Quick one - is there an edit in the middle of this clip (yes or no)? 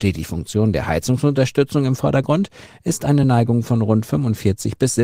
no